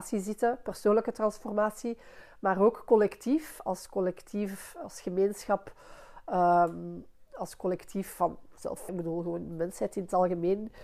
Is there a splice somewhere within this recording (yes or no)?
yes